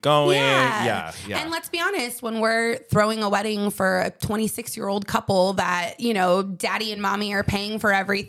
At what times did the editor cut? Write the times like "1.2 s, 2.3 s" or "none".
none